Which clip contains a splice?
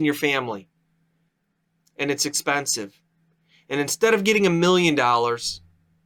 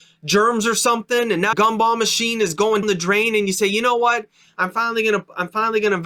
second; 2 cuts; at 1.5 s, 2.8 s

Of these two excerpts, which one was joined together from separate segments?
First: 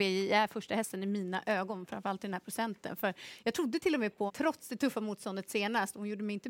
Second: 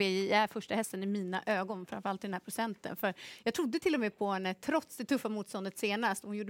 first; 1 cut; at 4.3 s

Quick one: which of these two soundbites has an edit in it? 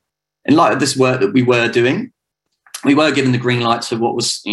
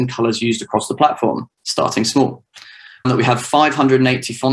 second; 2 cuts; at 1.5 s, 3.0 s

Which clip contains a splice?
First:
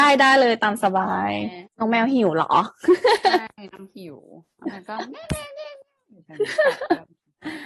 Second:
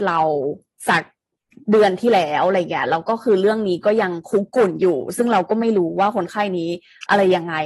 first; 1 cut; at 1.7 s

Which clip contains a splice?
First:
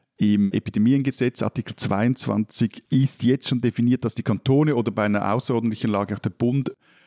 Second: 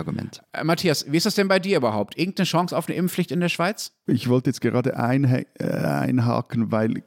first; 1 cut; at 2.9 s

